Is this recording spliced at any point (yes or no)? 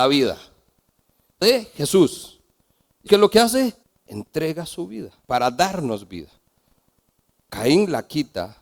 yes